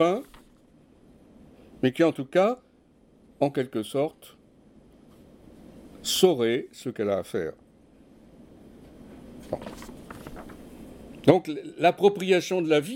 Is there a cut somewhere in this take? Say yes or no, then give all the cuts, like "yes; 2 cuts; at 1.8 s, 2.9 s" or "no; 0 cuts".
no; 0 cuts